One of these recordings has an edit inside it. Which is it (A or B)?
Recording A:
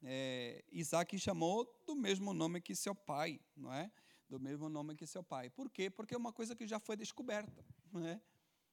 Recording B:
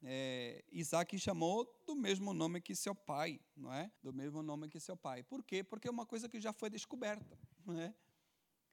B